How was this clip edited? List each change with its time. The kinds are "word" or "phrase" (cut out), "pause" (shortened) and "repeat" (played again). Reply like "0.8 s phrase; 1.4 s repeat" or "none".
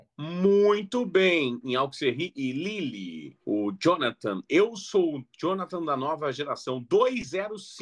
3.4 s pause